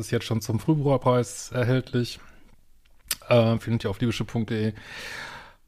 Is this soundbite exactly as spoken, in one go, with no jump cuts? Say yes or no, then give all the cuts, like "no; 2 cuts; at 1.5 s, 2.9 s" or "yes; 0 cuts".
yes; 0 cuts